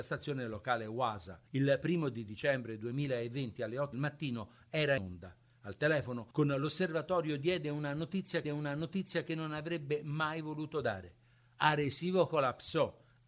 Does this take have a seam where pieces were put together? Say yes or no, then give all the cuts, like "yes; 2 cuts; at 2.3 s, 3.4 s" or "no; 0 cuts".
yes; 5 cuts; at 1.5 s, 3.9 s, 5.0 s, 6.3 s, 8.4 s